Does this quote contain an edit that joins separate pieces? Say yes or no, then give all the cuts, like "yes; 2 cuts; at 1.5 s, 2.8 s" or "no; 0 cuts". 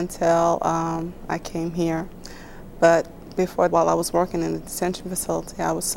yes; 1 cut; at 3.7 s